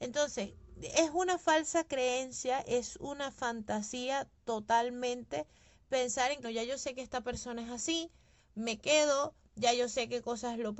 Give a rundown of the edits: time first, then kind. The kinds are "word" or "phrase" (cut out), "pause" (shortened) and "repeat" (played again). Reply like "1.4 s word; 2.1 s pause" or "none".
6.4 s word